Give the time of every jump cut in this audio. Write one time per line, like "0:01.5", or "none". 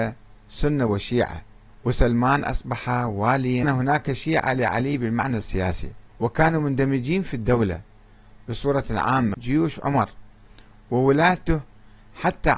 0:01.7
0:03.6
0:06.1
0:09.3